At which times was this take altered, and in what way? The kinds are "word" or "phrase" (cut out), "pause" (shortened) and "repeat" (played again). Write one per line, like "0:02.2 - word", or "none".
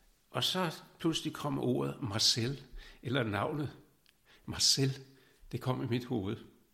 none